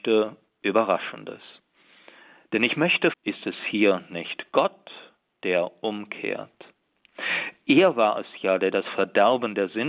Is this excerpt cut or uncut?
cut